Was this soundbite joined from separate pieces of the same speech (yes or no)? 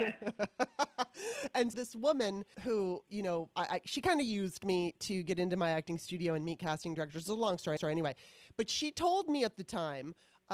yes